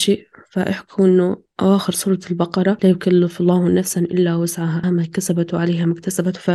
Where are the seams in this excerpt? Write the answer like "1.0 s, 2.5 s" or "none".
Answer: 4.8 s